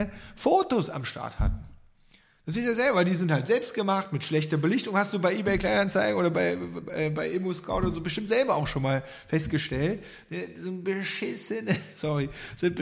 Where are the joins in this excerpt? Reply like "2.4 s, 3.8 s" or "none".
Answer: none